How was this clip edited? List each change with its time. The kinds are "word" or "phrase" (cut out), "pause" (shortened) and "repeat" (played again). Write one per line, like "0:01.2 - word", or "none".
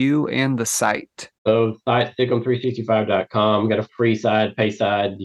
0:01.4 - pause
0:03.9 - word